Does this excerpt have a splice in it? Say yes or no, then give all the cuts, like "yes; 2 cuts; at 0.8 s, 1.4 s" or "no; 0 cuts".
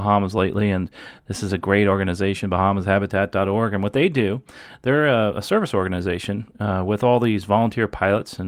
no; 0 cuts